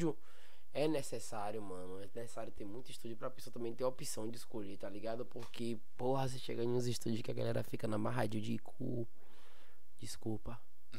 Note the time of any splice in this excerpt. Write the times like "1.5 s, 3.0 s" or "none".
none